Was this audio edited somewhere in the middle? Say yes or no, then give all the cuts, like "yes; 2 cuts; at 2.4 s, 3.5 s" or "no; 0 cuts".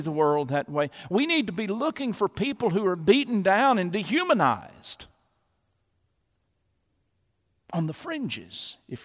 no; 0 cuts